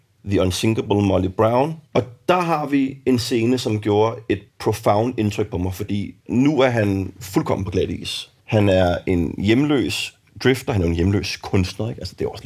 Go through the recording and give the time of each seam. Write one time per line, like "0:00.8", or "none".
0:01.9
0:04.5
0:06.2
0:08.4